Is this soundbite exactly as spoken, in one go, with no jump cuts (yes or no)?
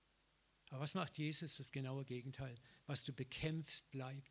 yes